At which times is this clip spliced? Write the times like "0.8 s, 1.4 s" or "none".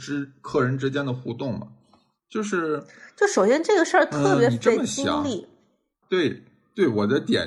6.0 s